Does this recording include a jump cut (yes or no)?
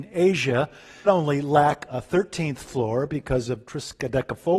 yes